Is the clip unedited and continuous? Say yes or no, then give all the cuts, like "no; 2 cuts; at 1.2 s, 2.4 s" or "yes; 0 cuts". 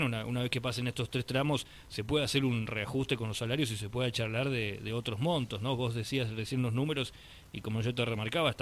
yes; 0 cuts